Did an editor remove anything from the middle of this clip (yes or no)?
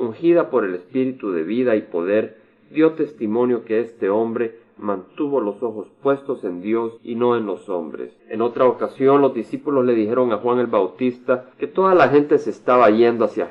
yes